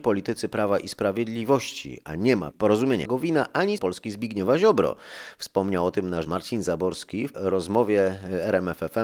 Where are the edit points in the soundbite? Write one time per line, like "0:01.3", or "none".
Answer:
0:02.5
0:03.0
0:03.8
0:06.2
0:07.3